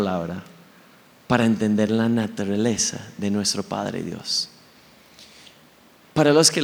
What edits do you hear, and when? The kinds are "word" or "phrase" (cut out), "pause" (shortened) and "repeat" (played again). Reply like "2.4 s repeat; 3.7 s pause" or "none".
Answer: none